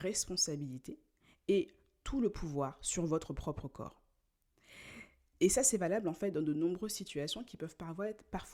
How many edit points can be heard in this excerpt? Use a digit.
0